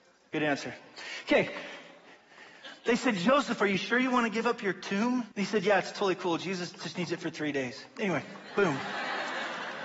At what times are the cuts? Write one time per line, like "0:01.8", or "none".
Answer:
0:05.3